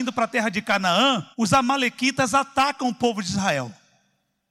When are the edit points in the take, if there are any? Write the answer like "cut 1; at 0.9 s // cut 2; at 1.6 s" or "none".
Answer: cut 1; at 1.3 s